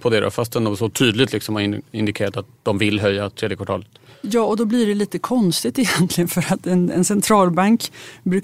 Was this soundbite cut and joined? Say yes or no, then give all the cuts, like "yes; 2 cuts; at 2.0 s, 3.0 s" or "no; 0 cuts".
no; 0 cuts